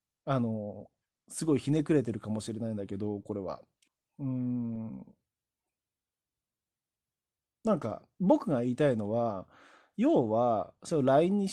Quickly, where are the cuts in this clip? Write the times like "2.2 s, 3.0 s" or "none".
3.9 s